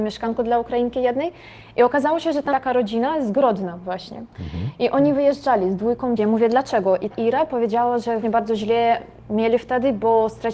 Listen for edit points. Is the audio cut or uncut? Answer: cut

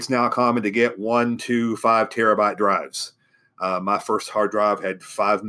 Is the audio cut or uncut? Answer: uncut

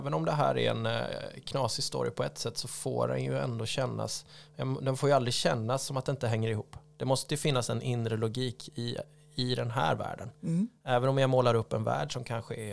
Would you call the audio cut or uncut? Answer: uncut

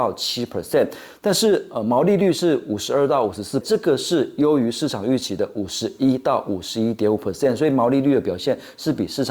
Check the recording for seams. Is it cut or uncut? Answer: cut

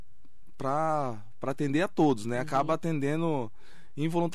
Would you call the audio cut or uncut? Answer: uncut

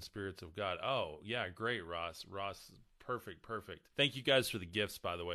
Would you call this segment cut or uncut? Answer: cut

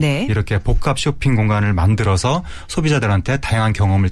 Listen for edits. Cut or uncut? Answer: uncut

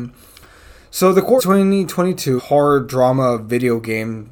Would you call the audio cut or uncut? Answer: cut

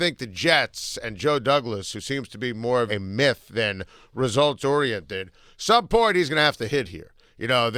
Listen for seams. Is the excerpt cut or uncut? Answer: cut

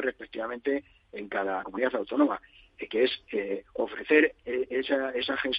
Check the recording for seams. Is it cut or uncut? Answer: cut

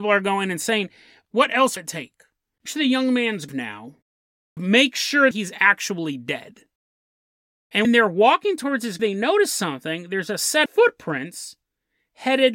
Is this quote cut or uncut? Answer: cut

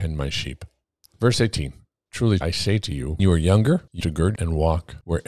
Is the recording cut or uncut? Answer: cut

